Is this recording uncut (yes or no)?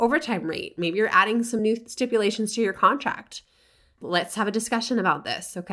yes